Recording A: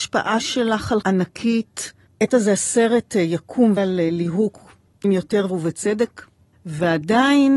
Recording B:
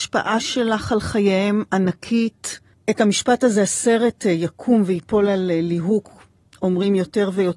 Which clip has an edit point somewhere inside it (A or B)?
A